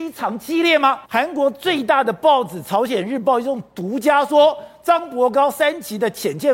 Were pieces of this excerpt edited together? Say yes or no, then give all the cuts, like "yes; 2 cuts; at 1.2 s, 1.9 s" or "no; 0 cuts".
yes; 1 cut; at 1.0 s